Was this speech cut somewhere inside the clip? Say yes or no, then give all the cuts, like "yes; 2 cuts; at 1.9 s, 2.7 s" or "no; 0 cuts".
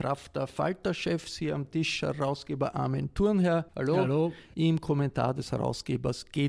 yes; 1 cut; at 3.7 s